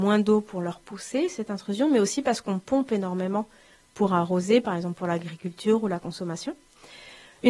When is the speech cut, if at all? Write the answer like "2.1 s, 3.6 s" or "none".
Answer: none